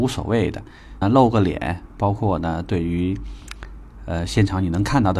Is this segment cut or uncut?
cut